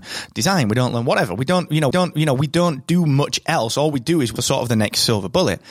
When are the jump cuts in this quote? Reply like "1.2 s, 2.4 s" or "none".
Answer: 1.9 s, 4.4 s